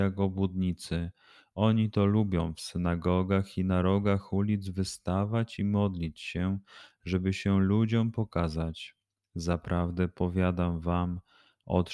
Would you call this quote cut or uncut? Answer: uncut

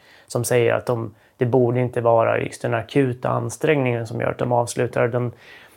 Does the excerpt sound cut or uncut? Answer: uncut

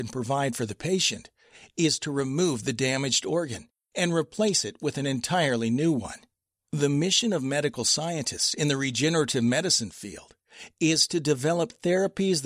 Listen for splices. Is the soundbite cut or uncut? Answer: uncut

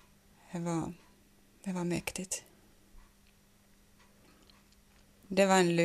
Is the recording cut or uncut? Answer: uncut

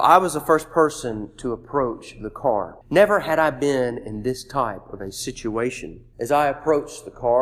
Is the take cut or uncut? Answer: cut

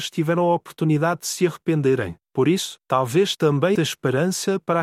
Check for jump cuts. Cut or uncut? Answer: cut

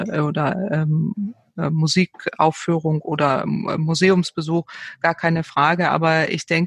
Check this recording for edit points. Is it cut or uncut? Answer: uncut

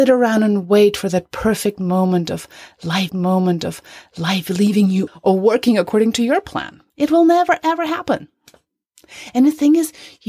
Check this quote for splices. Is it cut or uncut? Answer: cut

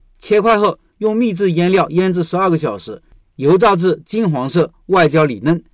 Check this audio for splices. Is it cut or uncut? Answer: uncut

